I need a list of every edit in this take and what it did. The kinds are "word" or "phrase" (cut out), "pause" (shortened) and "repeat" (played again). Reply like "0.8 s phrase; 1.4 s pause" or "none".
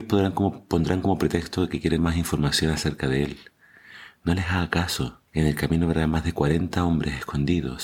2.0 s word; 5.3 s pause